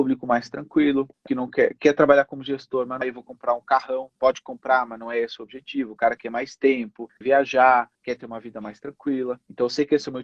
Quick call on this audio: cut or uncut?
cut